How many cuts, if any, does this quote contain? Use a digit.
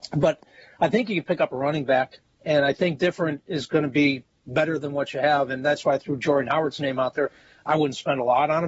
0